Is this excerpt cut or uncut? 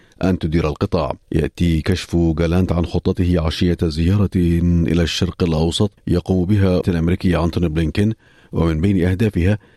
cut